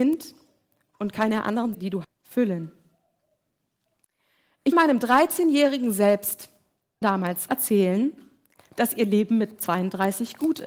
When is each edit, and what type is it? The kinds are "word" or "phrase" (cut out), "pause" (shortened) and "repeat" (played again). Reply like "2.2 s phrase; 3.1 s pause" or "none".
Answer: 1.7 s word; 2.0 s word; 4.7 s word; 7.0 s word; 7.5 s word